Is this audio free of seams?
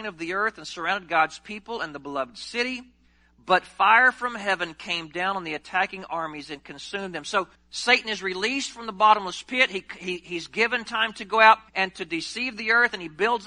no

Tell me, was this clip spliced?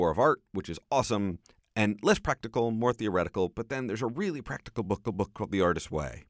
yes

